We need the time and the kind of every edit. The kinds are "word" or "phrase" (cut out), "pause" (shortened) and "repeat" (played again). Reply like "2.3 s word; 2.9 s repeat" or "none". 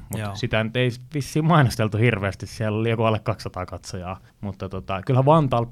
4.3 s pause